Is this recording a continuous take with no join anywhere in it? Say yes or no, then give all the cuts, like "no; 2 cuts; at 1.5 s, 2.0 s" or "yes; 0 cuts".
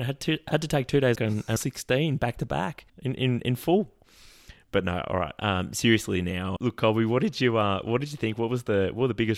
no; 4 cuts; at 1.1 s, 1.6 s, 2.9 s, 6.6 s